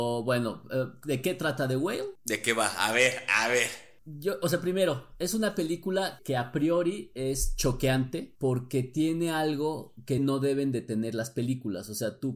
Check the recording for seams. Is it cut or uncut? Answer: cut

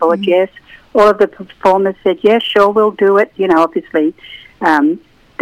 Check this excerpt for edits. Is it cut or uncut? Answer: uncut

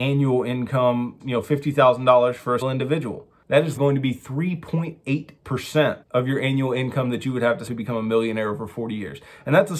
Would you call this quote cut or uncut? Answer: cut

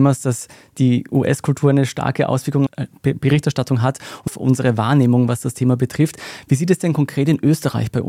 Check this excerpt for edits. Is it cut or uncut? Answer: cut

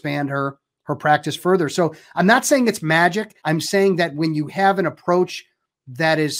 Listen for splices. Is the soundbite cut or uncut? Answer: cut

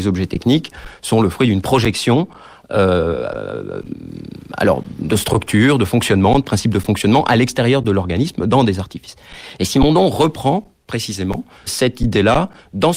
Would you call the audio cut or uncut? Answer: cut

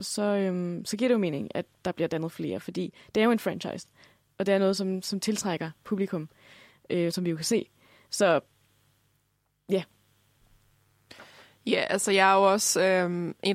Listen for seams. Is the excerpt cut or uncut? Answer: uncut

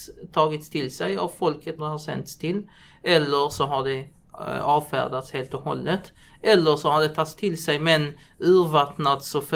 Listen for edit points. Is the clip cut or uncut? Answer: cut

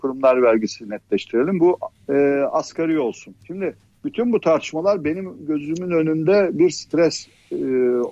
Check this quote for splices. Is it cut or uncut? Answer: cut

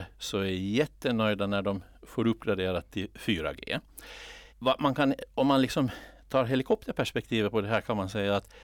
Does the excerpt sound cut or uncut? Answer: cut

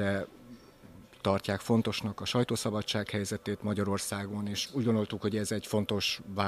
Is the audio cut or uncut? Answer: uncut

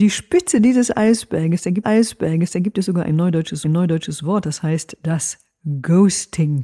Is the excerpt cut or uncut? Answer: cut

